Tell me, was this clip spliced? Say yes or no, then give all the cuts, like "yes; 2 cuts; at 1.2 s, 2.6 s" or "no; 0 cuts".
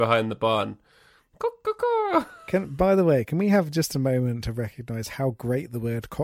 no; 0 cuts